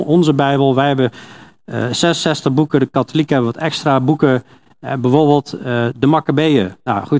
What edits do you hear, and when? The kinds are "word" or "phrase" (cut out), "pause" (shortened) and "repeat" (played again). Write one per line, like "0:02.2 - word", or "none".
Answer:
none